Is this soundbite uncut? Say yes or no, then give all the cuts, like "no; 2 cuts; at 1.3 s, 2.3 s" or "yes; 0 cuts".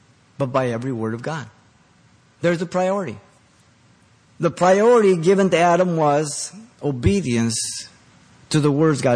yes; 0 cuts